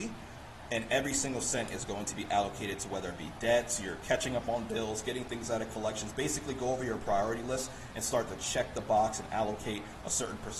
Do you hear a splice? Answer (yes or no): no